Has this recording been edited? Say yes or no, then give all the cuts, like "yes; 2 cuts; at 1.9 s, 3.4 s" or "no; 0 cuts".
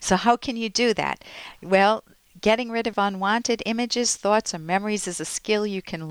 yes; 1 cut; at 2.9 s